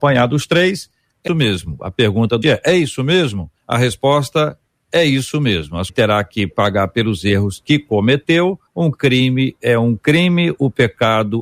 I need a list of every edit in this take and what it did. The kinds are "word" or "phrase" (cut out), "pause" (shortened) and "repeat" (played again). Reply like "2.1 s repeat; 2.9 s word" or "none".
1.3 s word; 2.4 s word; 3.6 s pause; 5.9 s phrase; 8.7 s pause